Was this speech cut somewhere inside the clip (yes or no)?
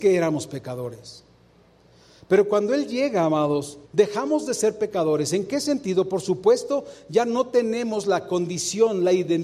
yes